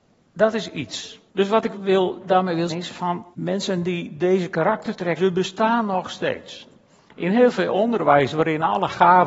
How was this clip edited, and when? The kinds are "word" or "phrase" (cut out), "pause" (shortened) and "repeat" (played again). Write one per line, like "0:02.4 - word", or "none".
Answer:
0:01.3 - pause
0:01.7 - word
0:02.7 - word
0:03.3 - pause
0:05.2 - word